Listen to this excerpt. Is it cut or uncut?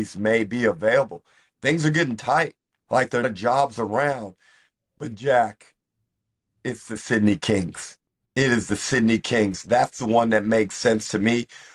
cut